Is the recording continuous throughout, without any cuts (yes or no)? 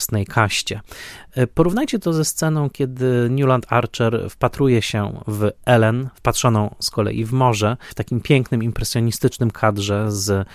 yes